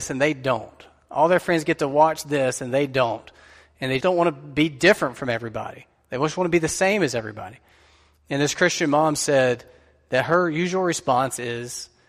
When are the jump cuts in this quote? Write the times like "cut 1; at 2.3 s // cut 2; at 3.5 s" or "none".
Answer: cut 1; at 4.0 s